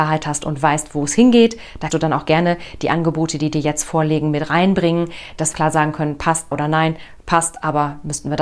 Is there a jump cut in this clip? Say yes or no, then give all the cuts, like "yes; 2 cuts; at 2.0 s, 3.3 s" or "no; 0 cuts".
yes; 3 cuts; at 1.9 s, 5.5 s, 6.5 s